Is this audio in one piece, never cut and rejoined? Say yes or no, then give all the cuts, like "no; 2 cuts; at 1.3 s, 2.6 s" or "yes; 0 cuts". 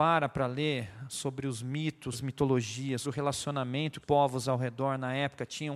no; 3 cuts; at 2.1 s, 3.0 s, 4.0 s